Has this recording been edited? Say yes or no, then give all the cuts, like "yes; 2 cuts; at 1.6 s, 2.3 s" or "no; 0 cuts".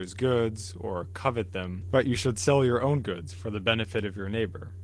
no; 0 cuts